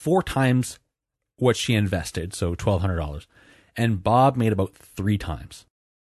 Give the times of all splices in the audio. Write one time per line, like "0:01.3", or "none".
none